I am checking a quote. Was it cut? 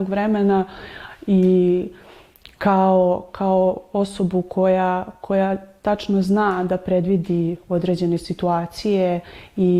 no; 0 cuts

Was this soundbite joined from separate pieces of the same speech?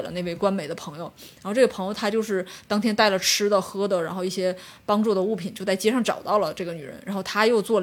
no; 0 cuts

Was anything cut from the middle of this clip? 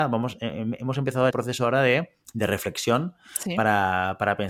yes; 2 cuts; at 1.3 s, 2.2 s

